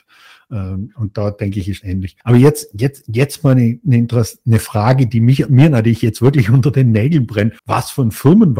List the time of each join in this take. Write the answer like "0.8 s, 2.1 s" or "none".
1.8 s, 2.2 s, 7.6 s